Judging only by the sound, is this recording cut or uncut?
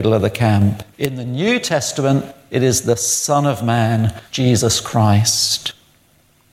cut